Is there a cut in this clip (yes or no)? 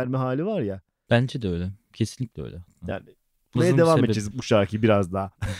yes